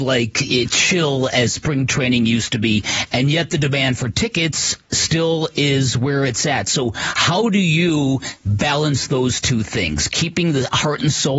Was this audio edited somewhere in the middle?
no; 0 cuts

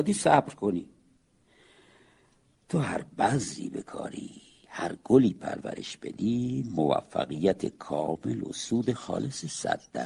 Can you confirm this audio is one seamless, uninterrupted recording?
yes; 0 cuts

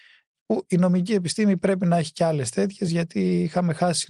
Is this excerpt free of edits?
yes; 0 cuts

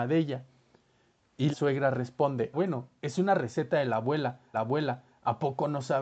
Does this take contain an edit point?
yes; 3 cuts; at 1.5 s, 2.5 s, 4.5 s

